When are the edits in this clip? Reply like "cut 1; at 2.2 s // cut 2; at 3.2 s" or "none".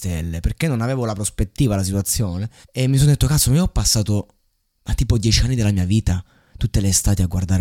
cut 1; at 2.6 s